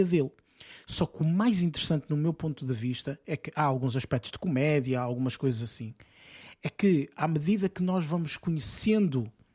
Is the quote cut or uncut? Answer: uncut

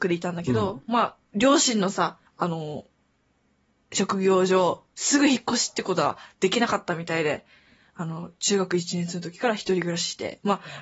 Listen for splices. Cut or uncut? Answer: cut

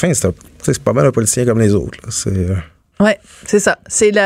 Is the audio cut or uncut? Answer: uncut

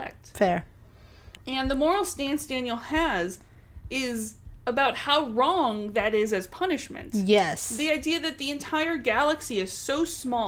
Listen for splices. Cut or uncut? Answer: cut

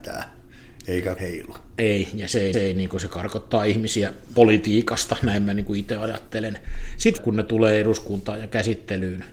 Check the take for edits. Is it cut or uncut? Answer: cut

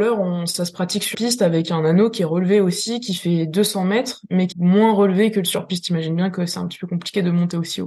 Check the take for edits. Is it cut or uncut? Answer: cut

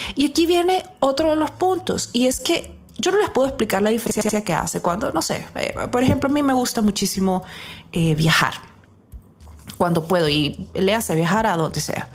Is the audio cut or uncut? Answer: uncut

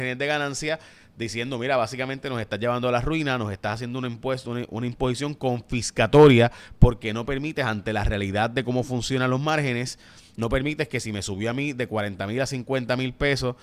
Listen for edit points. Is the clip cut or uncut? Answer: uncut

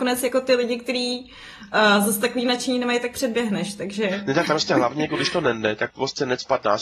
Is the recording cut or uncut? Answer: uncut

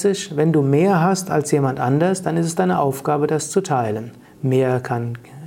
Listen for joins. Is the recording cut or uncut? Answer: cut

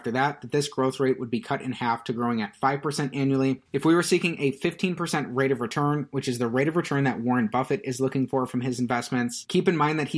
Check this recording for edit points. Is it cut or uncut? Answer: uncut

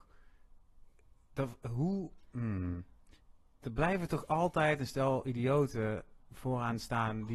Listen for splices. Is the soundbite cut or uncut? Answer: uncut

